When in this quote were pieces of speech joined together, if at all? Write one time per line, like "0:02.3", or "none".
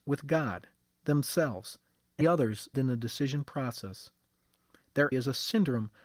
0:02.2
0:02.7
0:05.1